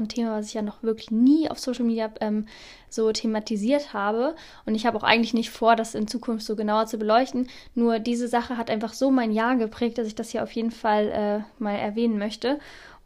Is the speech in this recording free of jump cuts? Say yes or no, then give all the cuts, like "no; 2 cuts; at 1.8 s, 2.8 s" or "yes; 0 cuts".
yes; 0 cuts